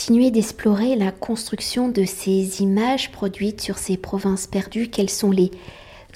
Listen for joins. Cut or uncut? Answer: uncut